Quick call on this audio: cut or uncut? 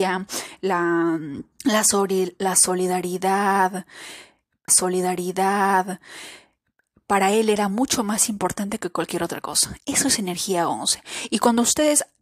cut